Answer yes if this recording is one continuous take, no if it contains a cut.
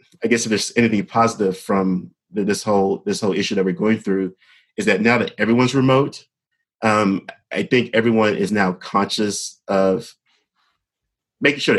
yes